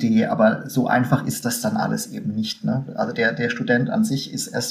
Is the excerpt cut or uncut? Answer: uncut